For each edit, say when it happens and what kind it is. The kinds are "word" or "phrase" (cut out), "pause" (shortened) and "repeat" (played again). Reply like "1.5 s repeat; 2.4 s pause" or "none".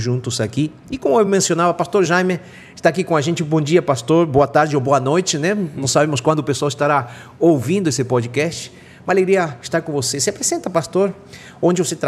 none